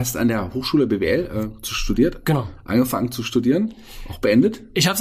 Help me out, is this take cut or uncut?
uncut